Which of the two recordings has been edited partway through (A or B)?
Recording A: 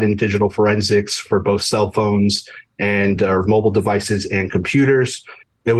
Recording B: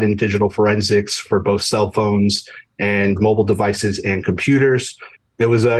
B